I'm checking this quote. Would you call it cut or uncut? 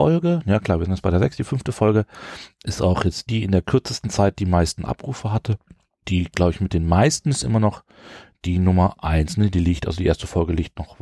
cut